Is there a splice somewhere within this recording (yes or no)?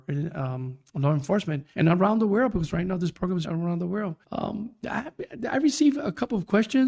yes